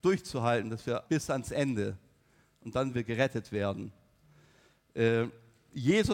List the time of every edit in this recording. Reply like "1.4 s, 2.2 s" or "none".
1.0 s, 2.9 s